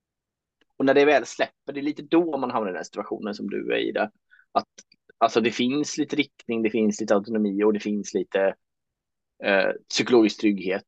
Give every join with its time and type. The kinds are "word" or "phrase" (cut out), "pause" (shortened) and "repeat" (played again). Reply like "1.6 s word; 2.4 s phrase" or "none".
none